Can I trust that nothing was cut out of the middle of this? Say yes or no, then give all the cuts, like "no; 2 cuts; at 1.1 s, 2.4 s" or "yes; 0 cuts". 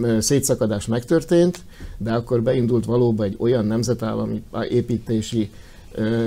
yes; 0 cuts